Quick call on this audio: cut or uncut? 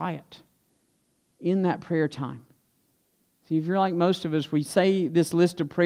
uncut